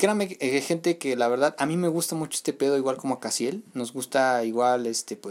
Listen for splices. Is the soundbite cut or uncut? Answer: uncut